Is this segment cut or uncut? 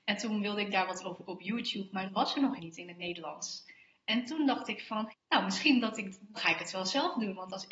cut